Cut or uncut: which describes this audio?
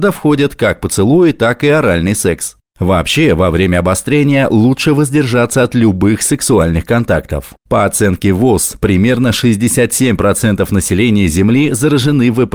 cut